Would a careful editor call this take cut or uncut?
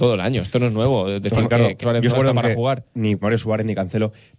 cut